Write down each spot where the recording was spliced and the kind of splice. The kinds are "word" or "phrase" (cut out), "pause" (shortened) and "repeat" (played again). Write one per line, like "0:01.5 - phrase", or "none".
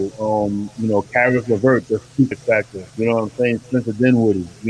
0:02.3 - word
0:02.9 - pause